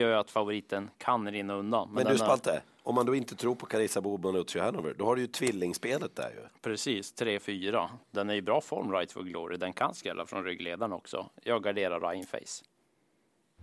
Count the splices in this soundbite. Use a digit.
1